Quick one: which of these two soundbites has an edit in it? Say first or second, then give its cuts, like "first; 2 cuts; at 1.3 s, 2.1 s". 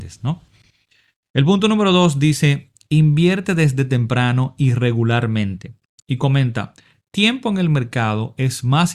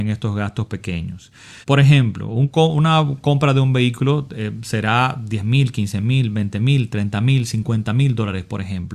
second; 1 cut; at 1.6 s